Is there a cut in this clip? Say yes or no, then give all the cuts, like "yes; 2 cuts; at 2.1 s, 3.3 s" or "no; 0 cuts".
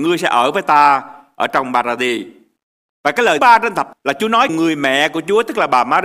yes; 3 cuts; at 3.4 s, 3.9 s, 4.5 s